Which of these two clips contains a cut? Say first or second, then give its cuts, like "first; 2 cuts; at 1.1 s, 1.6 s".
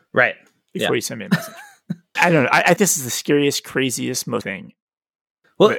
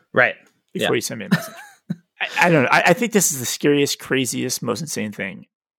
first; 3 cuts; at 2.2 s, 2.8 s, 4.4 s